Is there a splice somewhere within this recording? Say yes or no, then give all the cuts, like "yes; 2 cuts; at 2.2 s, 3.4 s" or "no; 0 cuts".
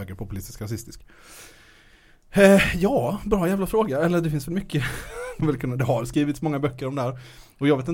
yes; 1 cut; at 5.4 s